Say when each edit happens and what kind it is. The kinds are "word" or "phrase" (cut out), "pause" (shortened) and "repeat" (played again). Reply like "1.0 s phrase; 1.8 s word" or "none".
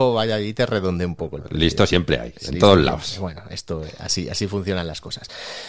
none